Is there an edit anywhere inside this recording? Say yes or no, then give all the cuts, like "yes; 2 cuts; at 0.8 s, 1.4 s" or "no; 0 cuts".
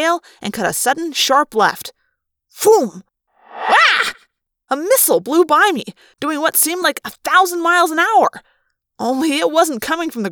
no; 0 cuts